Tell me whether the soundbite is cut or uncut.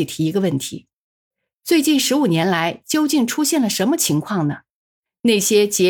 uncut